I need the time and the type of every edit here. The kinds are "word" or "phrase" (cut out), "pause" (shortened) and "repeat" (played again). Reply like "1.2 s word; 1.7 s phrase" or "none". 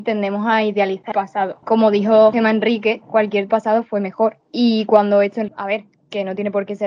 1.1 s word; 1.6 s pause; 2.3 s word; 3.5 s word; 4.4 s pause; 5.5 s word